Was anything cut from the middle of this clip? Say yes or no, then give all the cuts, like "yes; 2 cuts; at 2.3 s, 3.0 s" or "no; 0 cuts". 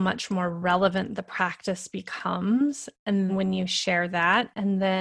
yes; 1 cut; at 3.3 s